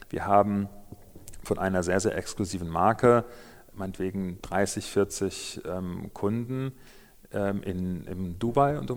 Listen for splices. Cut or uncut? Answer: cut